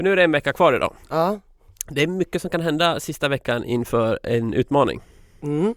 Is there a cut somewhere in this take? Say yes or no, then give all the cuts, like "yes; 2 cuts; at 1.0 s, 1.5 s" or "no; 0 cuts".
no; 0 cuts